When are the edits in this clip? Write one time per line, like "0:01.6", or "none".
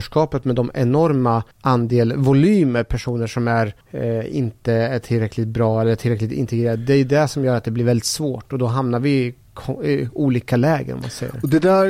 0:01.5
0:03.8

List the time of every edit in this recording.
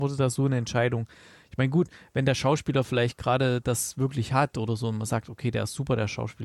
none

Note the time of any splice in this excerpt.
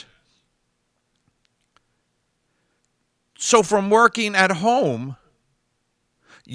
none

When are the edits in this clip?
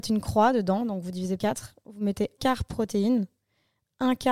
0:01.4
0:02.4

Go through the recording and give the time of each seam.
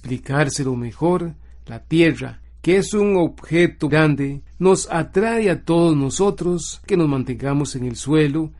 0:03.9
0:06.9

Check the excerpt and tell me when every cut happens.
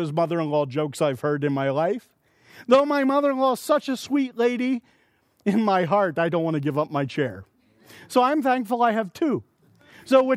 none

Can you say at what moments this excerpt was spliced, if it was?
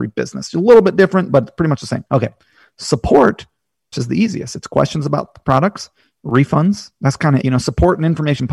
0:02.1
0:03.9
0:07.4

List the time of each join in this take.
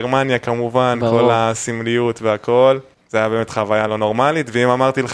0:02.9

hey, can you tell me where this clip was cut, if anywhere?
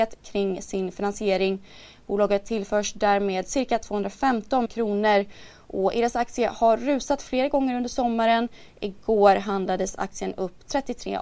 0:04.7

